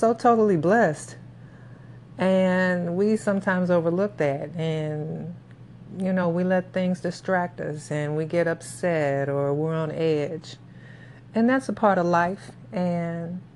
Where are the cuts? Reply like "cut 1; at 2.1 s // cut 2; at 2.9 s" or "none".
none

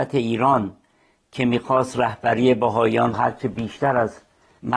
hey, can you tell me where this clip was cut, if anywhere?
cut 1; at 3.1 s

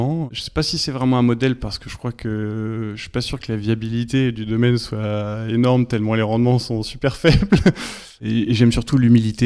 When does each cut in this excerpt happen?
none

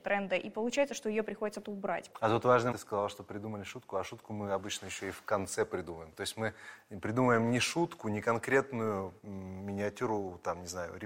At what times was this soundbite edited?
cut 1; at 1.6 s // cut 2; at 2.7 s // cut 3; at 9.2 s

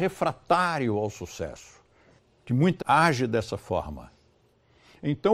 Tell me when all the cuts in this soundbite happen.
cut 1; at 2.2 s // cut 2; at 2.8 s

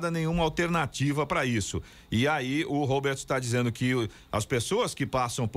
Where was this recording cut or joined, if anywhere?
none

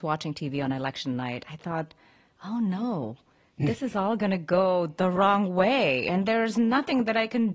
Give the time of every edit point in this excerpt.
none

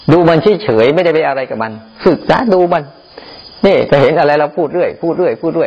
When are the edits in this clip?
none

